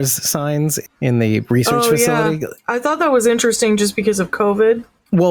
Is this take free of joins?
yes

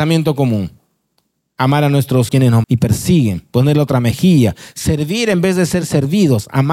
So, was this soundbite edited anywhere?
yes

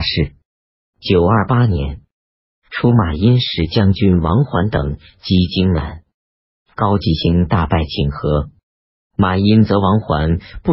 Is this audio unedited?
yes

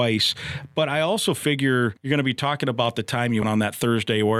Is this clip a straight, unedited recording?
no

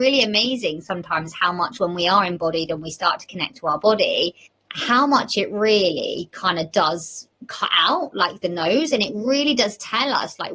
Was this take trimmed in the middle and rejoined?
yes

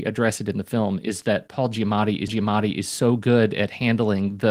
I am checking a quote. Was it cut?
yes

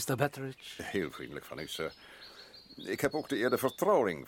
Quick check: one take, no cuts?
yes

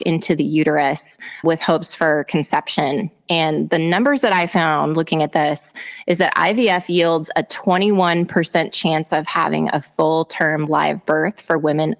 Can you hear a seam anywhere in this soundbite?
yes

